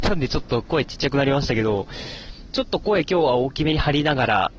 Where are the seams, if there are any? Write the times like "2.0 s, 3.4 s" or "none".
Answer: 2.5 s